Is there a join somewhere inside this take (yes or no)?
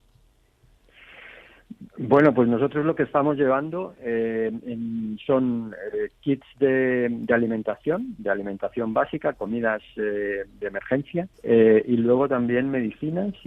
yes